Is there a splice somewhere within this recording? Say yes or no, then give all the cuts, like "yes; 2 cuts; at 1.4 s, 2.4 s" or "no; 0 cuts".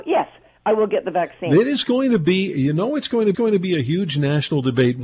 yes; 1 cut; at 3.3 s